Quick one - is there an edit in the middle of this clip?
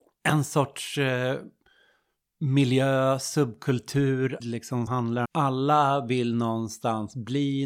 yes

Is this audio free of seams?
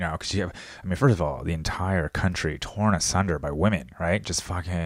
yes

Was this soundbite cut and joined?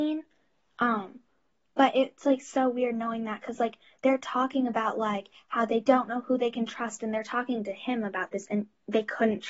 no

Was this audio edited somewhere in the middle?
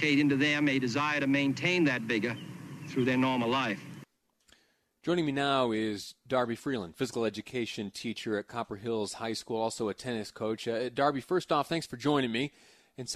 no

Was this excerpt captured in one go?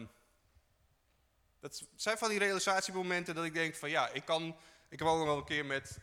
yes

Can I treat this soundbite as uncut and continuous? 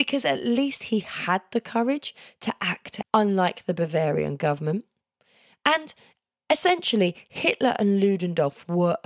no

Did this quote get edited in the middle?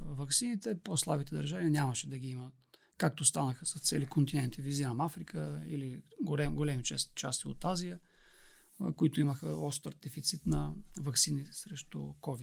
no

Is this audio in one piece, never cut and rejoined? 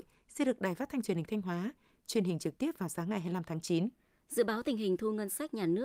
yes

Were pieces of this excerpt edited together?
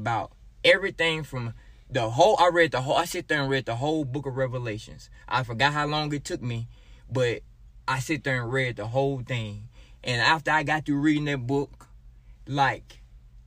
no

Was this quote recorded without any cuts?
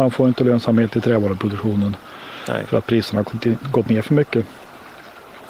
yes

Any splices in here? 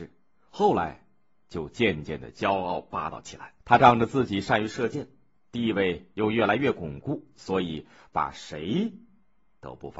yes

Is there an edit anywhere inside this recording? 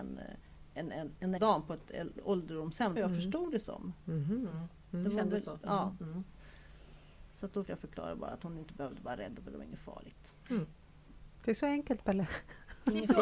yes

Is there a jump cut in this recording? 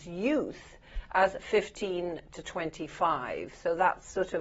no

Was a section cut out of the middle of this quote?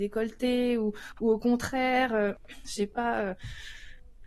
no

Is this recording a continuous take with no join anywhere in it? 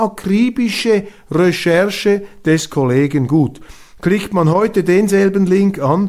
yes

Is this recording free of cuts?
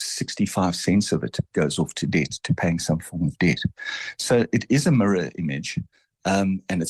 yes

